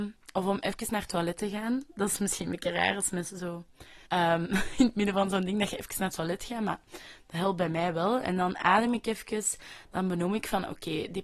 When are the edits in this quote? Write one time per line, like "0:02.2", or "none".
0:04.0

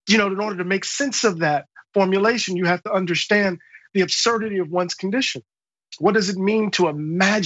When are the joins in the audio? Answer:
none

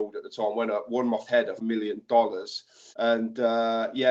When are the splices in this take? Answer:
0:01.3
0:01.6
0:02.9

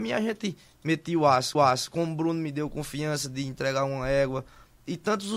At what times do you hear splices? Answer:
0:01.5

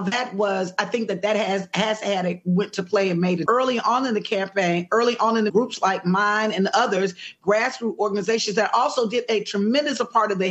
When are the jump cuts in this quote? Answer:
0:03.5
0:05.5

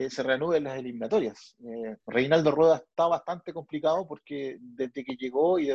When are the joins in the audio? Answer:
0:02.0

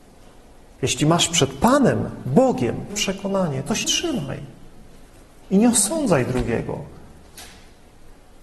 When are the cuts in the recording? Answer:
0:02.9
0:03.8

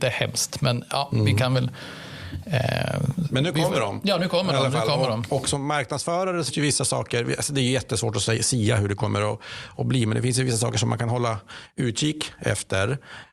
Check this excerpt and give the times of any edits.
0:06.5

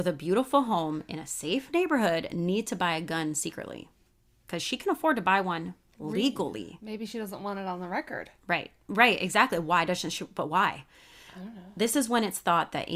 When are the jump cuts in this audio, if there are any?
none

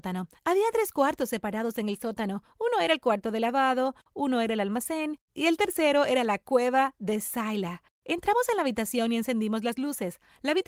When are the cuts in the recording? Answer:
0:04.0
0:05.3

